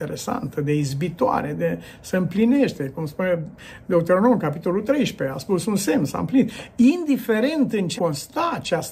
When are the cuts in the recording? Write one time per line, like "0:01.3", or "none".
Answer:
0:08.0